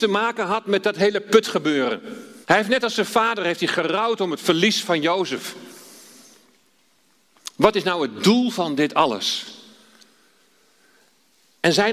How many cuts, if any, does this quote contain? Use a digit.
1